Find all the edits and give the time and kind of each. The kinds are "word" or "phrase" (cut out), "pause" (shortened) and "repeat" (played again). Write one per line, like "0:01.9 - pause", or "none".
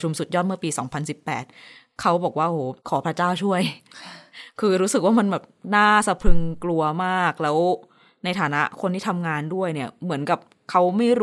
0:02.8 - pause